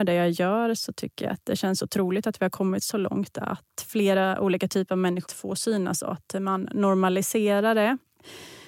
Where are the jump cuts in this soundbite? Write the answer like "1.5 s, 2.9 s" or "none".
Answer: 5.3 s